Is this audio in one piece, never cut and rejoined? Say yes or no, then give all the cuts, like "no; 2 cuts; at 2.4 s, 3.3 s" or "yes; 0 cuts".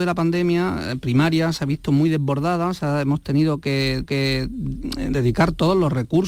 no; 1 cut; at 4.0 s